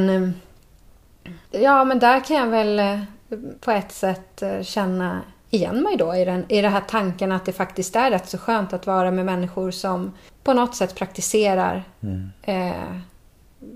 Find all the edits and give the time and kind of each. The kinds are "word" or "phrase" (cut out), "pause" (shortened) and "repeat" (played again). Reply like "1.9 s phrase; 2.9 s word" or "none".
1.5 s pause; 3.6 s pause; 10.3 s pause